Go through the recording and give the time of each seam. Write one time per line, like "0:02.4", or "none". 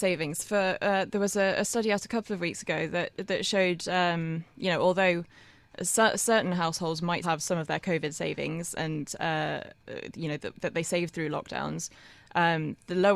0:07.2